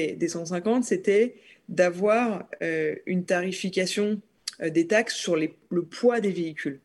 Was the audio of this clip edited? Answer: no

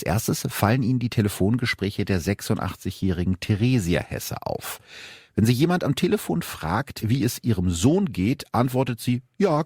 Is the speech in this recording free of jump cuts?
yes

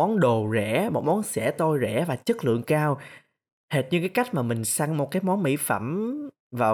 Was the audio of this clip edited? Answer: no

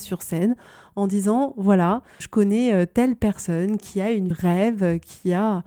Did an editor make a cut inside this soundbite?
yes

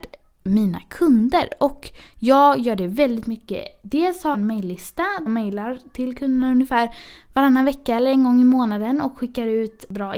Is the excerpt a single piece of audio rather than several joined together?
no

